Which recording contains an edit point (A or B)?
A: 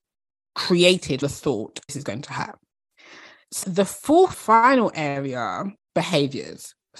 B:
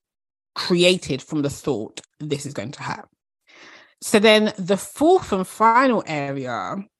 A